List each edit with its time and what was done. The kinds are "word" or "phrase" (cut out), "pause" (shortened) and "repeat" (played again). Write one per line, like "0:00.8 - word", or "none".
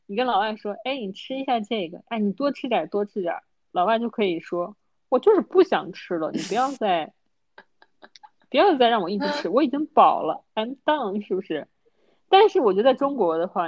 none